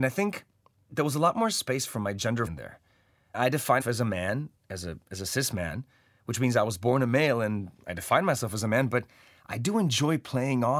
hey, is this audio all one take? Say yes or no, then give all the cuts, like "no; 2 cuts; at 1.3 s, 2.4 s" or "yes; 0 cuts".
no; 3 cuts; at 2.5 s, 3.3 s, 3.8 s